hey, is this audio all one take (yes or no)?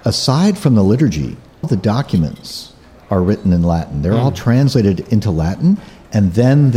no